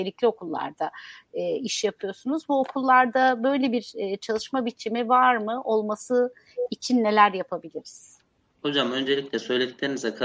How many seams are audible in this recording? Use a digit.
0